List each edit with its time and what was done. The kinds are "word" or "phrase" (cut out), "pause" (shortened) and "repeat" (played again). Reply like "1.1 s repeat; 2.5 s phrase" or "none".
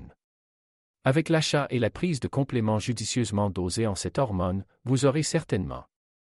none